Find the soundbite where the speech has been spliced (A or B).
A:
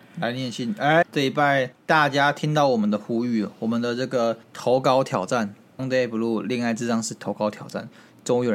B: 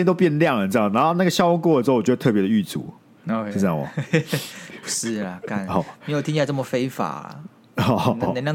A